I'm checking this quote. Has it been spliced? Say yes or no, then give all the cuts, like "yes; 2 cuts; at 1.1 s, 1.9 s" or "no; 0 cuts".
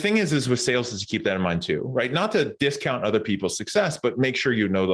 no; 0 cuts